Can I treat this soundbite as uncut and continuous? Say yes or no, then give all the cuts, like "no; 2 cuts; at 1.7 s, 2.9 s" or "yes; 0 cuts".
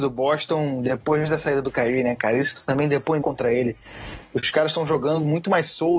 no; 1 cut; at 3.2 s